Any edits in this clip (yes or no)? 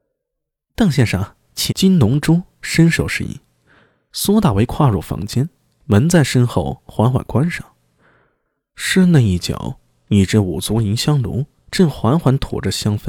yes